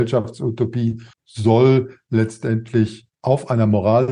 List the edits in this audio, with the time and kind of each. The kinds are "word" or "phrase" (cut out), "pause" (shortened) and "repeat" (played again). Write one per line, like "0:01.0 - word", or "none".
0:01.1 - pause
0:03.1 - pause